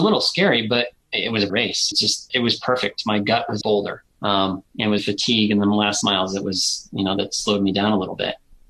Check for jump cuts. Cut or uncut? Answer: cut